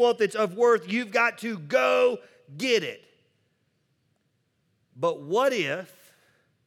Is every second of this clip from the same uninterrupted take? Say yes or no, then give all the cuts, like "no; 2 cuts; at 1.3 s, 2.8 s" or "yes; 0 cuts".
yes; 0 cuts